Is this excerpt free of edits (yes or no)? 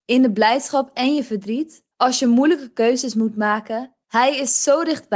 no